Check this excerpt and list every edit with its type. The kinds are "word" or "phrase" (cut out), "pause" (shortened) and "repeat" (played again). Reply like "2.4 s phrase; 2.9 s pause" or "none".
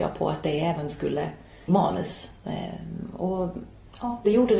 1.7 s phrase